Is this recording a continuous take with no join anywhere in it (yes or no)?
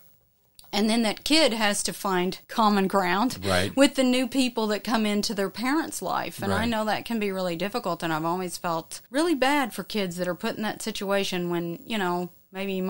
no